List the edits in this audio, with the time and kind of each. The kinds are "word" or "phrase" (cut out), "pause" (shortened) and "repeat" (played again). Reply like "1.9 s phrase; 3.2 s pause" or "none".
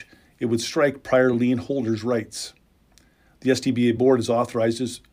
none